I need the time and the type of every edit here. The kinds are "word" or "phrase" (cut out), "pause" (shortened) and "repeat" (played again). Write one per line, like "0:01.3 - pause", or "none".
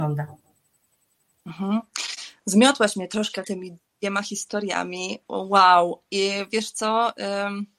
0:03.4 - word
0:05.2 - pause